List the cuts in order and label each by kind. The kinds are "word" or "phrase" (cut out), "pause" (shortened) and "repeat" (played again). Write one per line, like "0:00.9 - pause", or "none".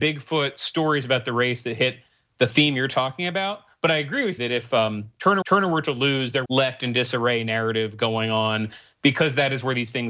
0:04.4 - word
0:05.4 - repeat
0:06.4 - phrase